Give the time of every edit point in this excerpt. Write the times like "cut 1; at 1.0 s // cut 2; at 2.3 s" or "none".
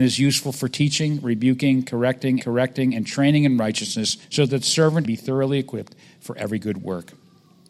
cut 1; at 2.4 s // cut 2; at 4.2 s // cut 3; at 5.0 s